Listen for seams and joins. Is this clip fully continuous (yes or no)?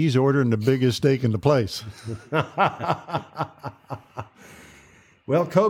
yes